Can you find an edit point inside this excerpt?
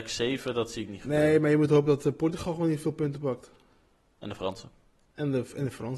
no; 0 cuts

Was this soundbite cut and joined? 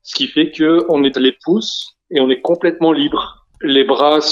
yes; 2 cuts; at 1.1 s, 2.0 s

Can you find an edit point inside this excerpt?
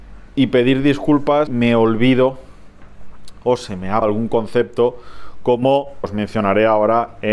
yes; 3 cuts; at 1.5 s, 4.0 s, 6.0 s

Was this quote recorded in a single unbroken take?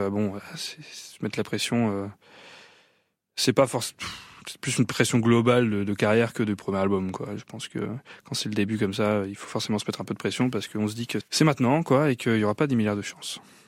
no; 1 cut; at 11.2 s

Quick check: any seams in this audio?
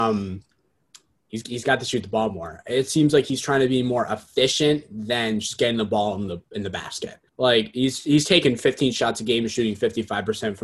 yes; 1 cut; at 7.3 s

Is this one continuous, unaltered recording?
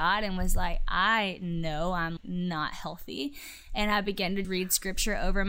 no; 2 cuts; at 2.2 s, 4.4 s

